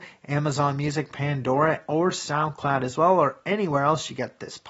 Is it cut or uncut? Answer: uncut